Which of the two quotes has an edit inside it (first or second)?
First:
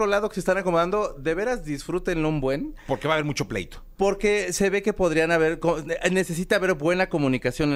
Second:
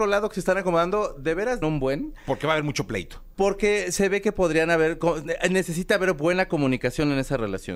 second